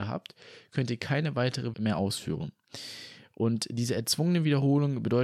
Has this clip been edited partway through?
yes; 1 cut; at 1.7 s

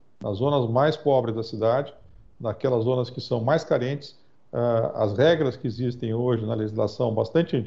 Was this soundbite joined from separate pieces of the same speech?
no; 0 cuts

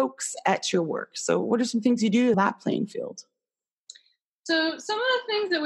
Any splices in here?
yes; 1 cut; at 2.3 s

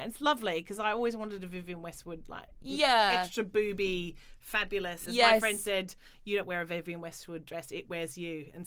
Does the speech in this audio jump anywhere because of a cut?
no; 0 cuts

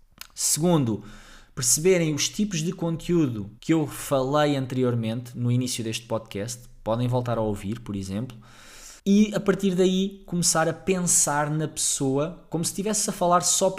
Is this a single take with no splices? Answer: no; 2 cuts; at 3.6 s, 9.0 s

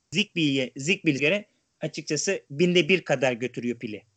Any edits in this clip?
yes; 1 cut; at 1.2 s

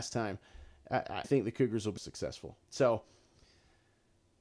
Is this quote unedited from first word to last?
no; 3 cuts; at 1.2 s, 2.0 s, 2.6 s

